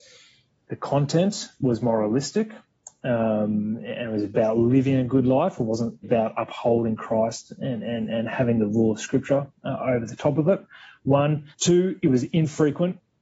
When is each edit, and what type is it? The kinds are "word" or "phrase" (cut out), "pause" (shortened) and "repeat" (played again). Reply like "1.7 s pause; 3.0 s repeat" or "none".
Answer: 6.0 s word; 11.5 s pause